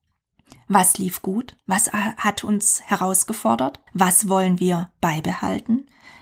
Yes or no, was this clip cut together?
yes